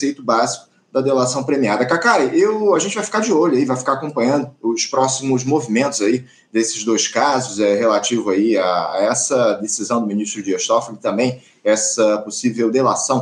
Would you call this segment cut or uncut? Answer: uncut